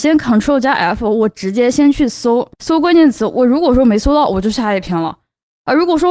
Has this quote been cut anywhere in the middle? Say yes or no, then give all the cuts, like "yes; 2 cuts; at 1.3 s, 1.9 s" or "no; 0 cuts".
yes; 1 cut; at 2.5 s